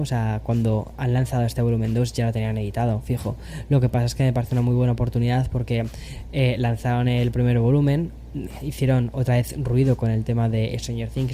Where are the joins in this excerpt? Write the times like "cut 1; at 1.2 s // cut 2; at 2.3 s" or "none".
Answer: none